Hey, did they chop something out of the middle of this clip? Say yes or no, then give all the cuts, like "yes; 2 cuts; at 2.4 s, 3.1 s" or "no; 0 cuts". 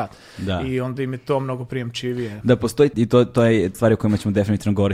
yes; 2 cuts; at 2.9 s, 3.7 s